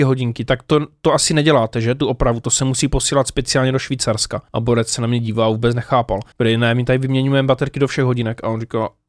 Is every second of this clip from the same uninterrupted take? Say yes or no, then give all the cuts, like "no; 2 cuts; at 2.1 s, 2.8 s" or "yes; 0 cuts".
no; 2 cuts; at 4.5 s, 6.3 s